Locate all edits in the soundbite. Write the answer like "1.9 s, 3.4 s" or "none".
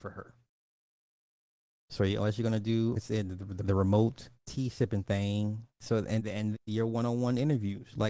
2.9 s, 3.6 s, 4.3 s, 5.7 s, 6.2 s, 6.5 s

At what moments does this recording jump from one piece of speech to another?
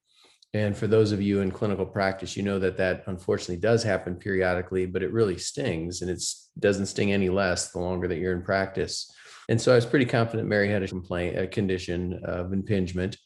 9.4 s, 10.9 s

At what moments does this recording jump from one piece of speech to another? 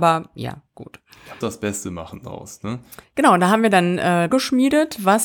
1.4 s, 3.0 s, 4.3 s

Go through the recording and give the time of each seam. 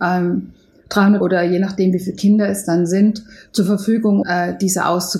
1.2 s, 4.2 s

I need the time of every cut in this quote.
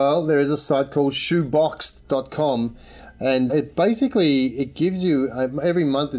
3.5 s

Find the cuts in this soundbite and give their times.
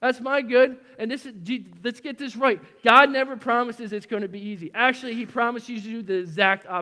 none

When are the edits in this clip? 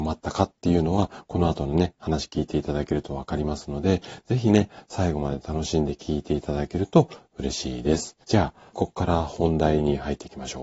8.2 s, 8.7 s

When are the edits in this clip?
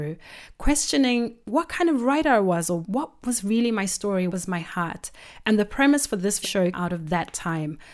2.8 s, 4.3 s, 6.4 s, 6.7 s

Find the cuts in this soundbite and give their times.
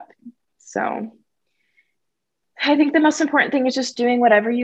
none

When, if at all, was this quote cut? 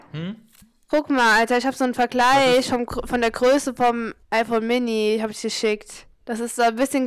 4.2 s, 6.1 s

